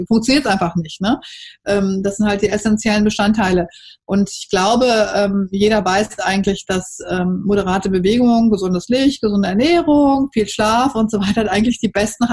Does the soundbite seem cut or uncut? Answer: uncut